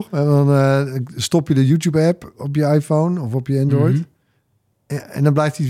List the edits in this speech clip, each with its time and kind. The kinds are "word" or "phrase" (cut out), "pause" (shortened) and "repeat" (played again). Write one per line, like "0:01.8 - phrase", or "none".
none